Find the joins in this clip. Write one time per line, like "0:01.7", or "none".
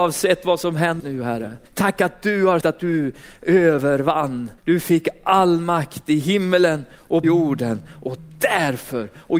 0:01.0
0:01.7
0:02.6
0:04.6
0:07.2